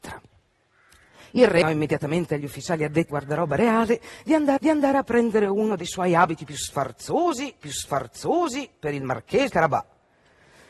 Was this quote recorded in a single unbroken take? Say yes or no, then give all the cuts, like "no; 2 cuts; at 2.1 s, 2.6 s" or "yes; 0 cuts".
no; 5 cuts; at 1.6 s, 3.1 s, 4.6 s, 7.6 s, 9.5 s